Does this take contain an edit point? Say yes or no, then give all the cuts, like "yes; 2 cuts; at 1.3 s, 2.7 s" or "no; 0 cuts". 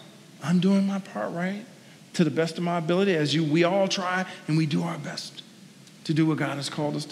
no; 0 cuts